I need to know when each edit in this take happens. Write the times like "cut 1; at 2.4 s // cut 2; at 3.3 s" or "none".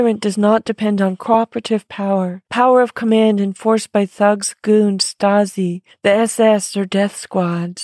cut 1; at 2.5 s // cut 2; at 5.9 s